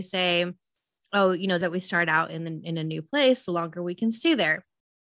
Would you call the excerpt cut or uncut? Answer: cut